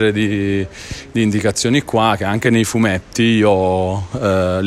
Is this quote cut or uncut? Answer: uncut